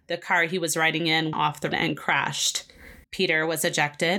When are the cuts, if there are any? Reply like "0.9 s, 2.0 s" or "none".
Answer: 1.3 s, 1.7 s, 3.0 s